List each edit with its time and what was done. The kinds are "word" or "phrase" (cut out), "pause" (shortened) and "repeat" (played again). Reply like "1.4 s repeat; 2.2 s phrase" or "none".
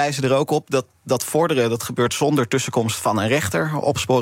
none